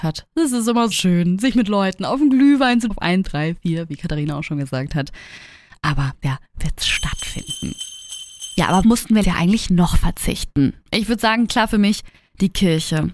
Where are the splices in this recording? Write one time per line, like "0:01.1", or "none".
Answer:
0:00.9
0:02.9
0:03.2
0:06.2
0:08.8
0:09.2
0:11.5